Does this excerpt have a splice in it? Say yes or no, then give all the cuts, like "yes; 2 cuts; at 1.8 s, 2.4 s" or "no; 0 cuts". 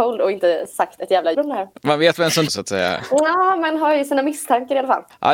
yes; 2 cuts; at 1.3 s, 2.5 s